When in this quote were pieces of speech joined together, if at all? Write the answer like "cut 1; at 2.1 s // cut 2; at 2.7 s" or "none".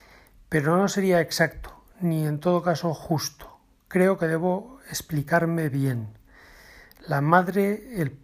none